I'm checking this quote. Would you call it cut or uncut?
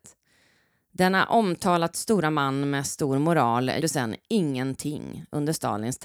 cut